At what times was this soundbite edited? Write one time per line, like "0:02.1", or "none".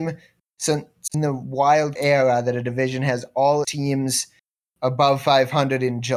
0:01.1
0:02.0
0:03.6